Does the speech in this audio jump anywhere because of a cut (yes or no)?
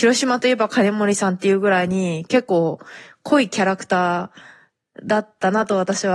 no